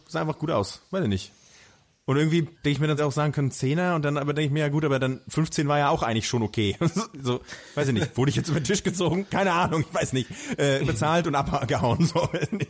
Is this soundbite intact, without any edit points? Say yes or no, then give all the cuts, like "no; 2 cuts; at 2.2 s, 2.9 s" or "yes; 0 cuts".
no; 2 cuts; at 2.5 s, 3.0 s